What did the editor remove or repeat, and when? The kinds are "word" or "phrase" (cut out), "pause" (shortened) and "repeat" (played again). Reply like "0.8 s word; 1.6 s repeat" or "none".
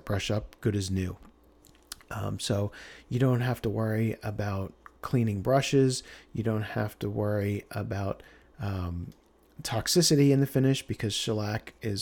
none